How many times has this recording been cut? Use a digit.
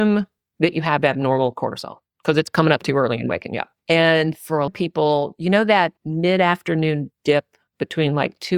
3